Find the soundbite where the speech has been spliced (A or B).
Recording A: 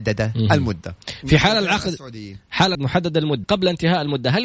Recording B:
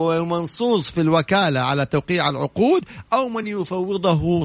A